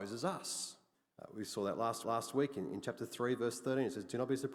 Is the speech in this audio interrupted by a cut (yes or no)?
yes